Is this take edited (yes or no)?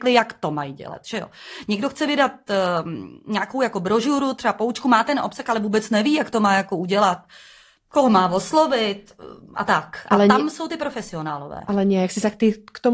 no